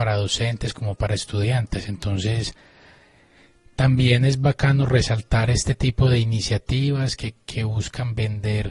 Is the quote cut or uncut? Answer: uncut